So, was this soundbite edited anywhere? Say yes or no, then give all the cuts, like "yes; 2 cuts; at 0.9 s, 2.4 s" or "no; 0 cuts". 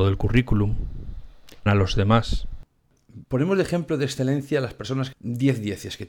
yes; 3 cuts; at 1.7 s, 3.2 s, 5.1 s